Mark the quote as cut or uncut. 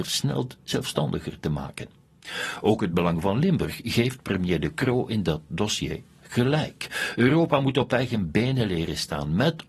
uncut